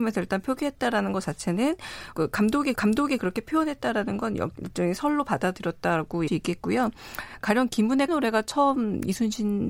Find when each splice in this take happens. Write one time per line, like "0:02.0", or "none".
0:02.1
0:02.7
0:06.3
0:08.1